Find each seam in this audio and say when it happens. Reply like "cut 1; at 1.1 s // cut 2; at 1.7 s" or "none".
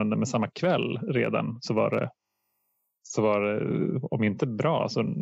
none